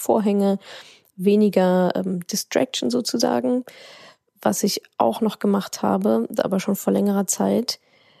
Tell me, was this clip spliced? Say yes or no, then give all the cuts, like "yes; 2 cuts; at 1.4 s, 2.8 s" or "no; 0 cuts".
no; 0 cuts